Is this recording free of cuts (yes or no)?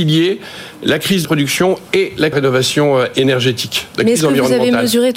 no